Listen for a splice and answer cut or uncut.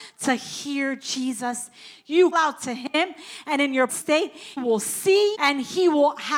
cut